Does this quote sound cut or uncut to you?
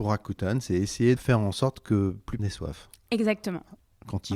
cut